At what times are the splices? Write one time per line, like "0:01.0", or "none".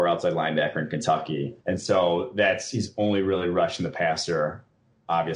0:01.6